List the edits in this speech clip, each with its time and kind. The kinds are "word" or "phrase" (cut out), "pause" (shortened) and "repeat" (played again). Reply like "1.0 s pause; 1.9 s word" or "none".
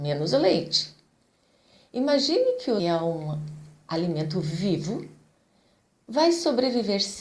2.8 s phrase